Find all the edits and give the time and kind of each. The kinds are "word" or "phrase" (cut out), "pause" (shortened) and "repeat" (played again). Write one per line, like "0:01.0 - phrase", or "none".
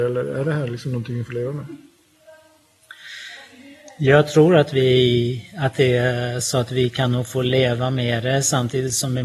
none